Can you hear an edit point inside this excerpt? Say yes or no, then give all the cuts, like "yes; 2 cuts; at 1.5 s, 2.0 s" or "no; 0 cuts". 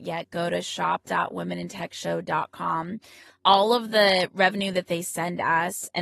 no; 0 cuts